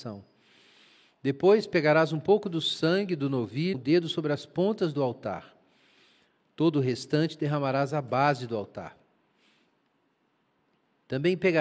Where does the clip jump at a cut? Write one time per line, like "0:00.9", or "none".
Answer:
0:03.7

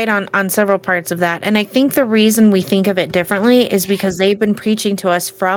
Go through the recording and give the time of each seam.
none

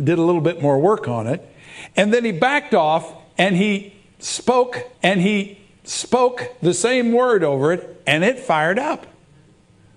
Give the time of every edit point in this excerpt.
0:04.9

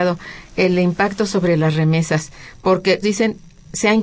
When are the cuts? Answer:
0:03.0

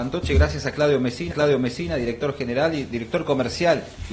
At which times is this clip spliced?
0:01.3

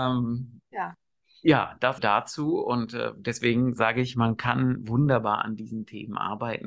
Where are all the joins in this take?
0:02.0

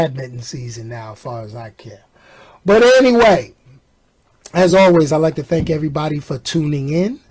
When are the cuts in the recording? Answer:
none

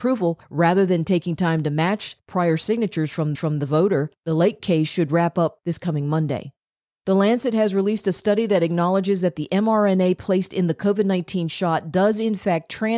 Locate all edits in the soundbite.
0:03.3

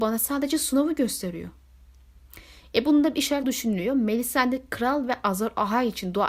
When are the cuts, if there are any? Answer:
0:03.4

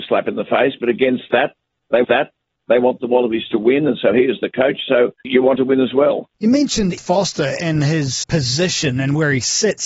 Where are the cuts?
0:02.0
0:05.2
0:05.6
0:06.3
0:07.0
0:08.2

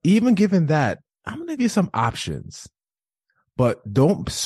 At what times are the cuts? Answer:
0:01.6

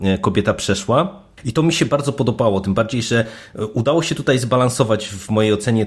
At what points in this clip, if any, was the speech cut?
none

